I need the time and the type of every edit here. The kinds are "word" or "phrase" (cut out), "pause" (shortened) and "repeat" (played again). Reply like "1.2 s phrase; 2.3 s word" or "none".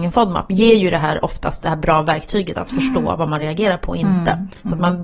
none